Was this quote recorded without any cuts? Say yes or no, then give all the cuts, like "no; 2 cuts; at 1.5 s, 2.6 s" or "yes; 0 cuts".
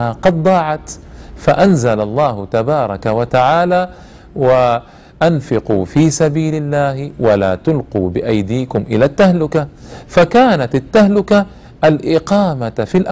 yes; 0 cuts